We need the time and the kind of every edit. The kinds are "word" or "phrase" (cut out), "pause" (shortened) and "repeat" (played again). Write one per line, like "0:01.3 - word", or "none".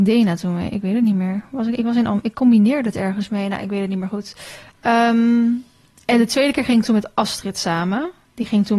none